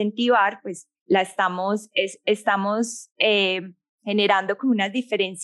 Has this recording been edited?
no; 0 cuts

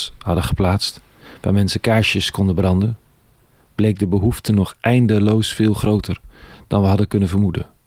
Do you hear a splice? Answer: no; 0 cuts

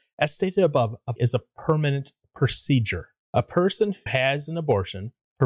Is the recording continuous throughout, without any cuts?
no; 2 cuts; at 1.2 s, 4.1 s

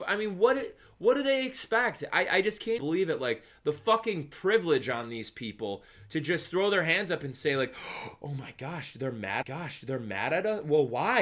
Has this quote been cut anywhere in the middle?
yes; 2 cuts; at 2.8 s, 9.4 s

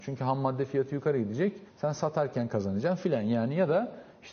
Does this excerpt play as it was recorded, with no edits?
no; 1 cut; at 1.7 s

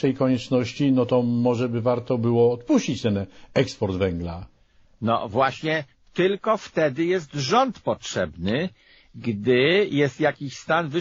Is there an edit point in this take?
no; 0 cuts

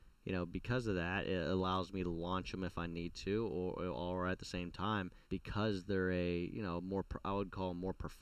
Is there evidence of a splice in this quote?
yes; 1 cut; at 5.2 s

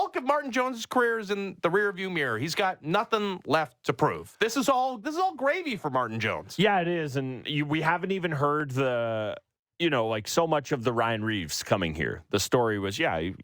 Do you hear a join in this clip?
no; 0 cuts

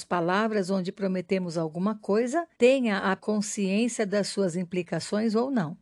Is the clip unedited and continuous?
no; 2 cuts; at 2.5 s, 3.2 s

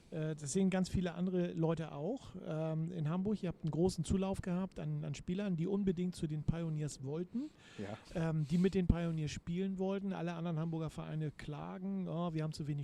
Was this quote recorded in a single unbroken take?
yes; 0 cuts

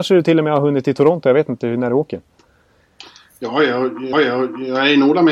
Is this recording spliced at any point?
yes; 1 cut; at 4.1 s

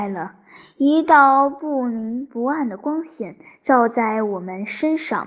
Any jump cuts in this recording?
no; 0 cuts

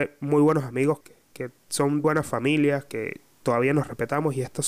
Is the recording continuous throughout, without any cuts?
no; 2 cuts; at 1.0 s, 2.0 s

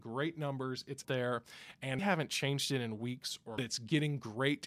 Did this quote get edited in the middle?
yes; 3 cuts; at 1.0 s, 2.0 s, 3.6 s

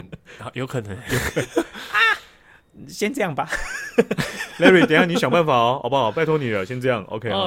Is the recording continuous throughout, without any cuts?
yes; 0 cuts

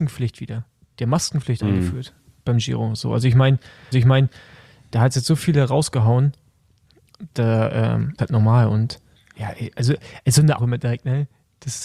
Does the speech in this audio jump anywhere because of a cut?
yes; 4 cuts; at 3.9 s, 8.2 s, 9.2 s, 10.6 s

